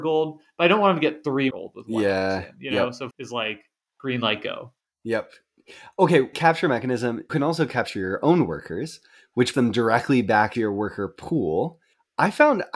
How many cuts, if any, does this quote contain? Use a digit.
6